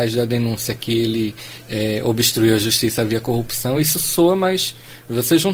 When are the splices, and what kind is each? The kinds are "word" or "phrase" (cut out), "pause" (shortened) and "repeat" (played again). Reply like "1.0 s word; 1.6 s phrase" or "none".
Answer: none